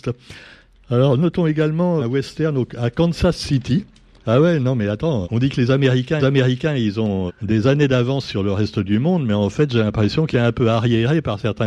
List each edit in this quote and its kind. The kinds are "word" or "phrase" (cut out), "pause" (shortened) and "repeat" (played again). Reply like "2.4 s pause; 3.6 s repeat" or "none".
2.0 s word; 5.2 s word; 6.2 s repeat; 7.3 s word; 10.3 s phrase